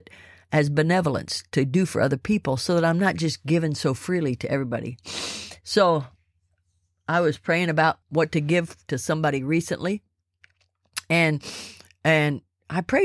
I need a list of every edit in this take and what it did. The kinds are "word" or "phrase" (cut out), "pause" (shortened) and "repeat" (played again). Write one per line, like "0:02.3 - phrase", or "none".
0:08.0 - pause